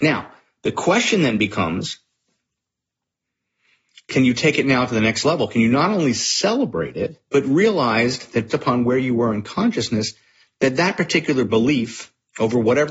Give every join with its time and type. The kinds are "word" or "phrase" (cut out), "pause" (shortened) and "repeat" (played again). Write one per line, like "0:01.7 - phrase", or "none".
0:07.3 - pause
0:08.5 - word

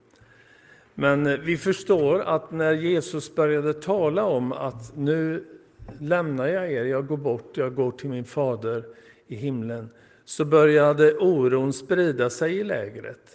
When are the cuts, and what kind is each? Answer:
none

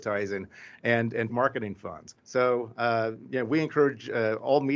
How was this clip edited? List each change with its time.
0:01.3 - word
0:02.2 - pause

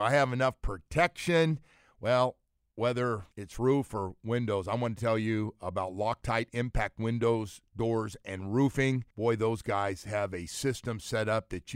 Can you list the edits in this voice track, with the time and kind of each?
0:03.3 - pause
0:09.1 - pause

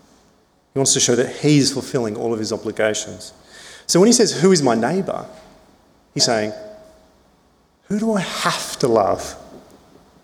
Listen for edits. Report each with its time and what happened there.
0:06.2 - word

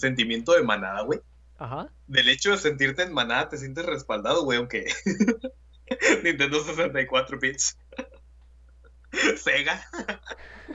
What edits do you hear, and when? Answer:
none

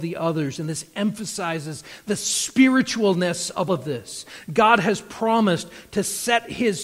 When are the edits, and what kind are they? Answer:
0:03.7 - word

